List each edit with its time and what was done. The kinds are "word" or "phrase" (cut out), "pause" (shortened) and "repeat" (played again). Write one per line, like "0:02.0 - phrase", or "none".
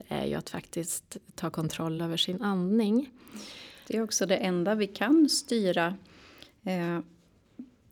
none